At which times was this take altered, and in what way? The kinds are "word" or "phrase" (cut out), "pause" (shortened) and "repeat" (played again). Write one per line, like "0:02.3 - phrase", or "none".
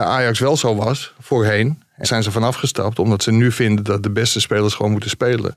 0:02.0 - word